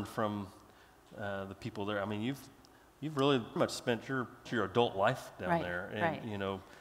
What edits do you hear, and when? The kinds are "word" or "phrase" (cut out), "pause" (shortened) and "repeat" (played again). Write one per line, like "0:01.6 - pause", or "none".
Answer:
0:03.6 - word
0:04.5 - word

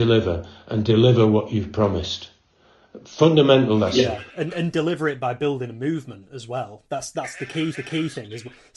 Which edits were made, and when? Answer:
0:07.7 - repeat

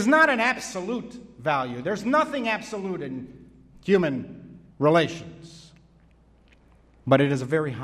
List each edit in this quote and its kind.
0:04.7 - pause

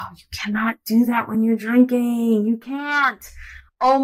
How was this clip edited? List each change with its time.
none

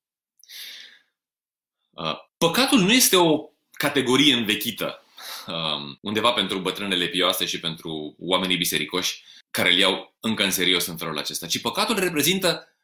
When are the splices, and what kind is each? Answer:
0:02.3 - pause
0:06.0 - pause
0:09.4 - pause
0:10.2 - pause

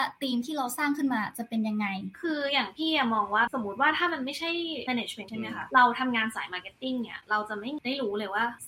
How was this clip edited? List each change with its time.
0:05.3 - word

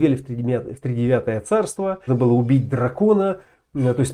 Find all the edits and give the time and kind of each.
0:02.1 - word

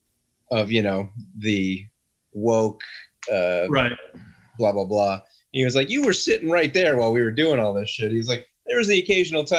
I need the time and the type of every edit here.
none

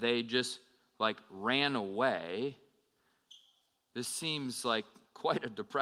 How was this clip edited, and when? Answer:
none

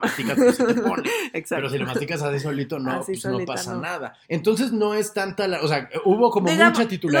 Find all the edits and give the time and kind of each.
0:04.2 - pause

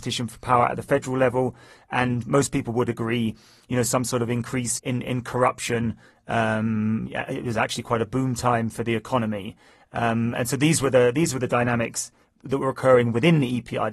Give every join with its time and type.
0:04.8 - word

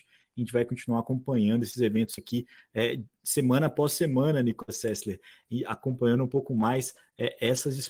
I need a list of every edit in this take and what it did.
none

